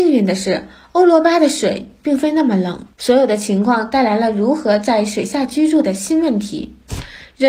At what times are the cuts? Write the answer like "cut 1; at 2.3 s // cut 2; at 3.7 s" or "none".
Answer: cut 1; at 2.9 s